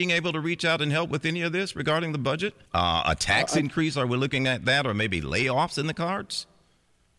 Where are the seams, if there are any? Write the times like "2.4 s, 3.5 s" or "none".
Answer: 2.6 s

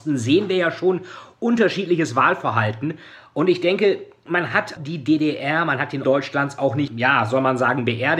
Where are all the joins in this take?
4.8 s, 6.0 s, 6.9 s

